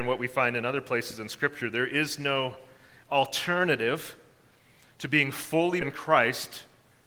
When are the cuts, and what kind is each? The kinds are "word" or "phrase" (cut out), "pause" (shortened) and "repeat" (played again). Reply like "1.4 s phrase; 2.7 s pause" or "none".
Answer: 5.8 s word